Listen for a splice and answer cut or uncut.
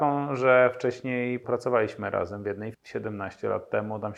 cut